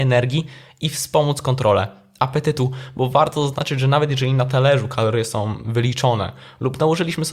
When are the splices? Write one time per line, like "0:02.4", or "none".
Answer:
none